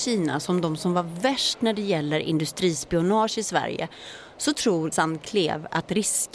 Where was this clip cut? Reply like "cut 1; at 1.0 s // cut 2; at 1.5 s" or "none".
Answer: cut 1; at 4.9 s